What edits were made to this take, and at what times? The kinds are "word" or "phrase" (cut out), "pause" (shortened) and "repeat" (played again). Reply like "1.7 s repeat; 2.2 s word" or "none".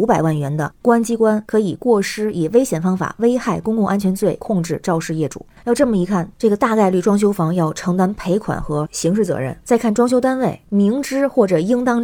9.6 s pause